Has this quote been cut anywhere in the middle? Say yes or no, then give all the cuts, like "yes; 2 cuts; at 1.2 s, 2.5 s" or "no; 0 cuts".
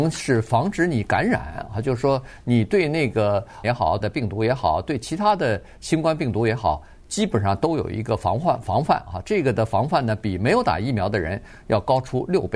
yes; 2 cuts; at 3.6 s, 4.0 s